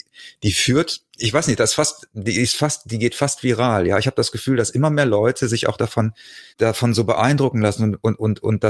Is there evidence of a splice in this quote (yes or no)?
yes